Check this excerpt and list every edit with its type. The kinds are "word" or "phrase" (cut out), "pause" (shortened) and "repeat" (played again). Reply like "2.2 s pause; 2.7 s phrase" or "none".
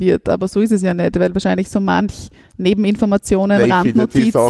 none